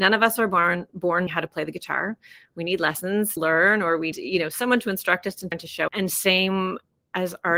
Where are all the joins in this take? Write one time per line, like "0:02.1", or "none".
0:01.3
0:03.4
0:04.1
0:05.5
0:05.9